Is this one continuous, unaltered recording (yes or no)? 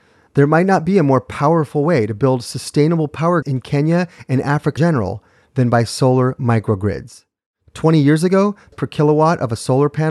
no